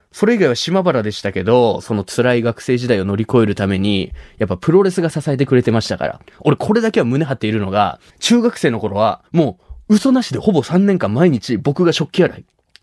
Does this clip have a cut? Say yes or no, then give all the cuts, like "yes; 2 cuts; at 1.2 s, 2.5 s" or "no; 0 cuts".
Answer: yes; 3 cuts; at 6.3 s, 8.1 s, 9.3 s